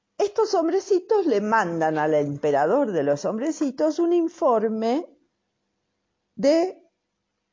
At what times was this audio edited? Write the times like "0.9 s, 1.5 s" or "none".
none